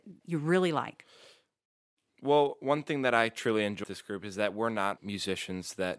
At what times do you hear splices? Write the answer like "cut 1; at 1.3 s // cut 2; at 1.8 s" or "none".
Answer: cut 1; at 3.8 s // cut 2; at 5.0 s